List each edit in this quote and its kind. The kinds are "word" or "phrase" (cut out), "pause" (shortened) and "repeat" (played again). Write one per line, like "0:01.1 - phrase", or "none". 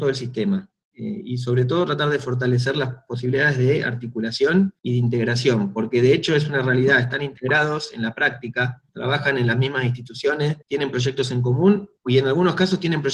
0:04.8 - pause
0:08.9 - pause
0:10.6 - pause
0:12.0 - pause